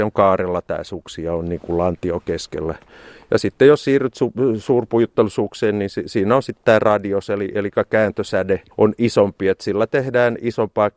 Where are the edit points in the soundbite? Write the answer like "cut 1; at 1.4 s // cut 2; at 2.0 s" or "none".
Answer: cut 1; at 8.7 s

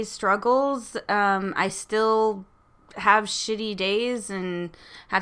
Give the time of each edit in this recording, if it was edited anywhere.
none

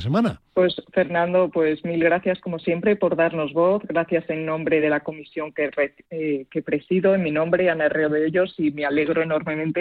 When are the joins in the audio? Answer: none

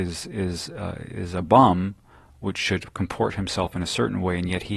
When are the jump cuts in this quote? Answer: none

